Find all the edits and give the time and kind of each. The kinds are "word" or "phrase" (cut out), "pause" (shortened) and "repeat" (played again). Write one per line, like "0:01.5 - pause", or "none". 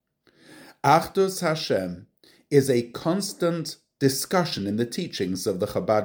none